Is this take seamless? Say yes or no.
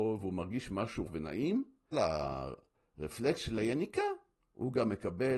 no